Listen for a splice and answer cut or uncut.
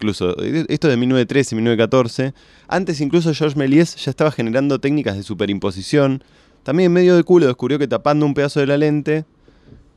uncut